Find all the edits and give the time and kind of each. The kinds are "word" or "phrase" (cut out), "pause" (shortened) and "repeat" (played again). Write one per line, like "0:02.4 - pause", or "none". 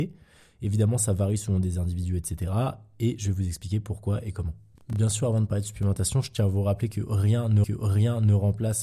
0:07.6 - repeat

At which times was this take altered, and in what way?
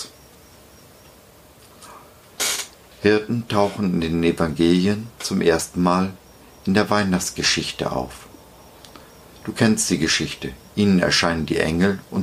none

